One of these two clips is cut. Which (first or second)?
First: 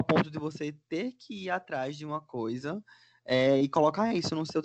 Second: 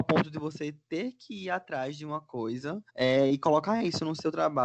second